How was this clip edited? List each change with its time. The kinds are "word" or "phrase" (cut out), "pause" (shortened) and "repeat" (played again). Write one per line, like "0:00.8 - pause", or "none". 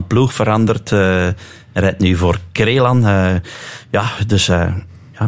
none